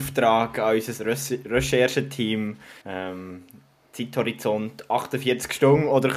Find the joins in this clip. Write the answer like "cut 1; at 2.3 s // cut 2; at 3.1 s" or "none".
cut 1; at 2.8 s